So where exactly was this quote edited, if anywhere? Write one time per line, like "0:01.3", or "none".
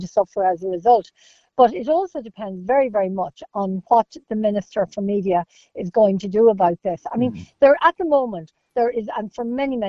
none